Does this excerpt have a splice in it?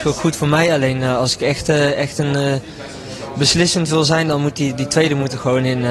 no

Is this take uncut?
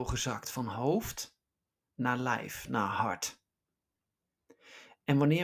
yes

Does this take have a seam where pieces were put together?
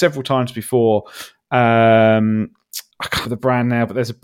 yes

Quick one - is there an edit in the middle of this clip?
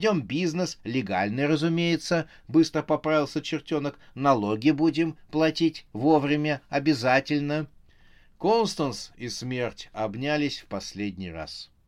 no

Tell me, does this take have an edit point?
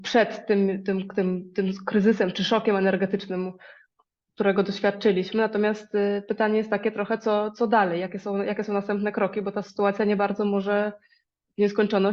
no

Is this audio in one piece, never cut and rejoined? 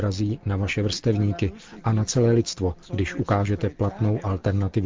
no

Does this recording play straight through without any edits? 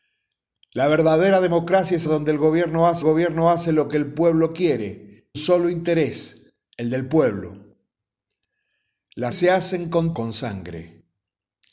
no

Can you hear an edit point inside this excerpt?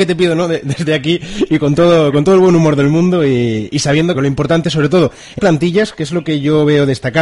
yes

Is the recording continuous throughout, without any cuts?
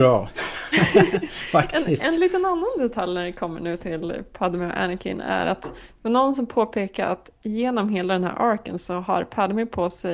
yes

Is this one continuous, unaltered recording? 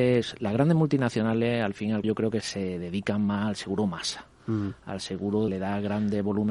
no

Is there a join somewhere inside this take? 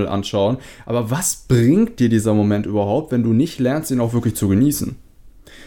no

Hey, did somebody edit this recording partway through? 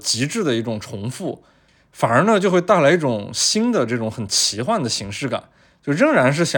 no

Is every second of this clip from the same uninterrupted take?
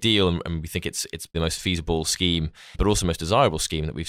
no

